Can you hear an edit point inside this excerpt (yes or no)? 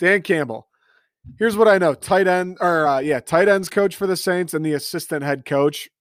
no